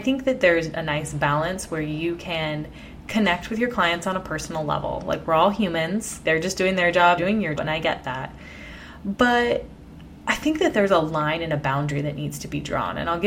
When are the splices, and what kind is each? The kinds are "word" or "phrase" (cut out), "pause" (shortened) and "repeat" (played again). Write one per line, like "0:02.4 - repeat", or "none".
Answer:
0:06.2 - word
0:07.2 - word
0:07.6 - word